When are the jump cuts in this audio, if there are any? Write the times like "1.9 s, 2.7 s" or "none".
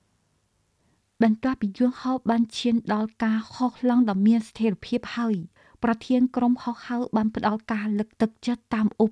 5.6 s

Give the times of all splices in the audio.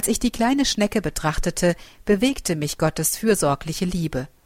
none

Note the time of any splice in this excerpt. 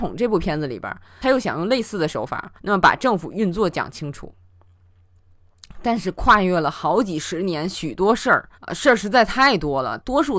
2.6 s, 8.5 s

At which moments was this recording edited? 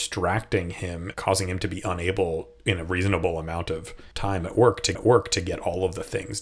1.1 s, 4.1 s, 4.9 s

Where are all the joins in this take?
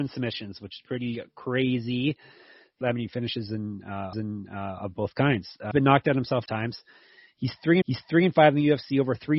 2.8 s, 4.1 s, 5.7 s, 6.5 s, 7.8 s

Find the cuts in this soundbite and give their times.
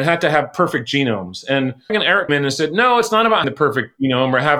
1.9 s, 2.3 s, 3.4 s

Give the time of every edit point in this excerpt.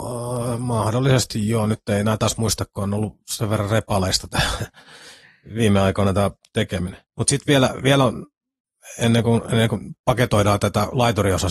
7.1 s

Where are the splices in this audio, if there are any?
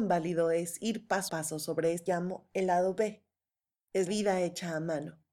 1.3 s, 2.1 s, 4.1 s

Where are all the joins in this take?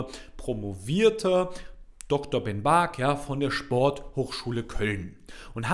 none

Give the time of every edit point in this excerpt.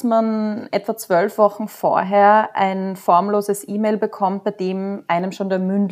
none

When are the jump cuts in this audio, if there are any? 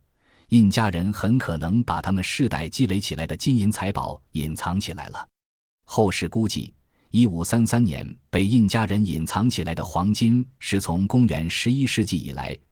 none

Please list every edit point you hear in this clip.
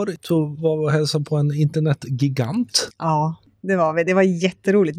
none

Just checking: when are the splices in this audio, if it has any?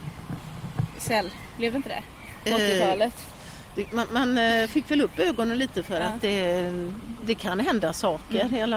none

